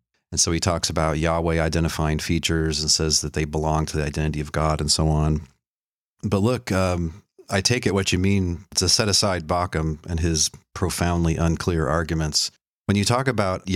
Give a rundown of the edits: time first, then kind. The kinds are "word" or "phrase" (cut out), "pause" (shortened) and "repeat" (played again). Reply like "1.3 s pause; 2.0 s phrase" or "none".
none